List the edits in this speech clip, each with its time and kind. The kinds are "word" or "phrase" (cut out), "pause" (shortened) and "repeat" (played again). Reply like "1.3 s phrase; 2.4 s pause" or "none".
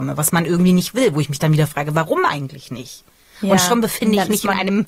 none